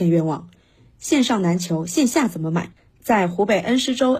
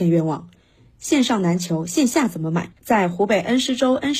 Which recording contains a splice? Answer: second; 1 cut; at 2.8 s

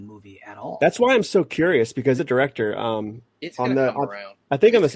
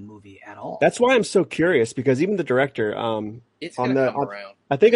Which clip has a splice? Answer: first; 1 cut; at 2.2 s

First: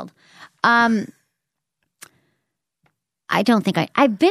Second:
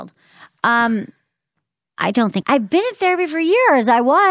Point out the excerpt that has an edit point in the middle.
second; 2 cuts; at 1.6 s, 2.4 s

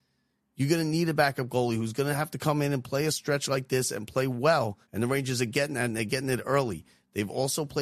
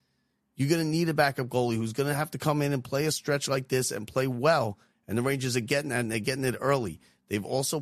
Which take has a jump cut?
first; 1 cut; at 4.8 s

